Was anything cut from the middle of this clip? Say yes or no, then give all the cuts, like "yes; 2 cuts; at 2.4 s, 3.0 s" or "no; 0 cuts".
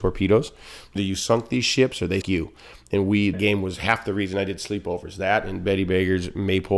yes; 3 cuts; at 1.0 s, 2.2 s, 3.3 s